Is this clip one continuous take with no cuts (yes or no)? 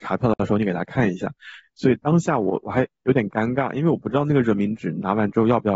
no